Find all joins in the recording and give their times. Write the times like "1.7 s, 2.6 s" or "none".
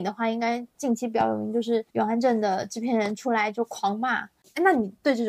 1.9 s